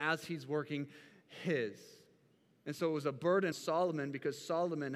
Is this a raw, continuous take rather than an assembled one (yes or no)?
no